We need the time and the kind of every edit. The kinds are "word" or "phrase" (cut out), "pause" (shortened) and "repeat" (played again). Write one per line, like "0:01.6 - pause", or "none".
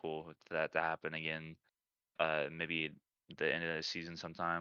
none